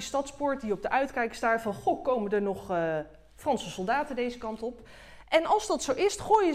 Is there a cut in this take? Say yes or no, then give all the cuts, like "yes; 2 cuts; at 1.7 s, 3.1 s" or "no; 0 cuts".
no; 0 cuts